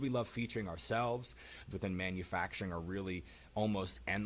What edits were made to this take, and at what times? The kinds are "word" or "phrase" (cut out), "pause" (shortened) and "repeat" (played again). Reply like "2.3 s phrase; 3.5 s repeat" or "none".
1.7 s phrase